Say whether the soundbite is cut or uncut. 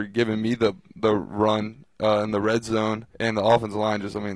cut